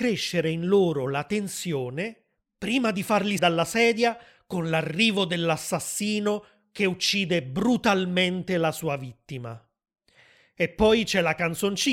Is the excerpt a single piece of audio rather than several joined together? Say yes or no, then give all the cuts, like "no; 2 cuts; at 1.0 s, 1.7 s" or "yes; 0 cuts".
no; 1 cut; at 3.4 s